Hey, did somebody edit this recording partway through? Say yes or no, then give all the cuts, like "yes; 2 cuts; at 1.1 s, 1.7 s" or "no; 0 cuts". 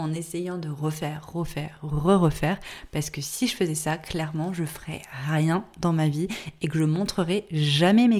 no; 0 cuts